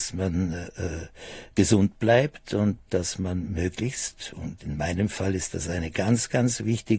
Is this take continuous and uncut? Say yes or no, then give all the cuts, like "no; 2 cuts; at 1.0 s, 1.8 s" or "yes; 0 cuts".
no; 1 cut; at 2.9 s